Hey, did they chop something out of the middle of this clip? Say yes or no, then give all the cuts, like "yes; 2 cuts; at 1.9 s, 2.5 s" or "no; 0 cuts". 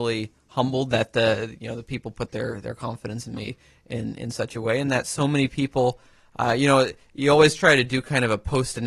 no; 0 cuts